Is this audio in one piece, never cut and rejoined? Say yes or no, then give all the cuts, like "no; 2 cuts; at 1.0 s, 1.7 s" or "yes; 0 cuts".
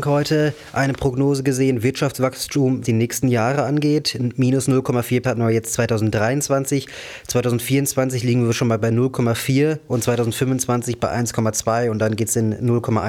no; 2 cuts; at 2.8 s, 5.2 s